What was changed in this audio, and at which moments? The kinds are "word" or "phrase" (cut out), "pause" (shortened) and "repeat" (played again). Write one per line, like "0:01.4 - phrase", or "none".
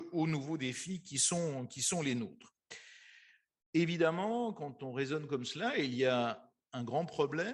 none